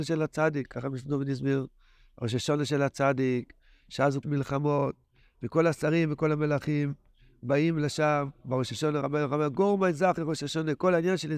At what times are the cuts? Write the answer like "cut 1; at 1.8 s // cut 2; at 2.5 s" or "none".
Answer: cut 1; at 4.2 s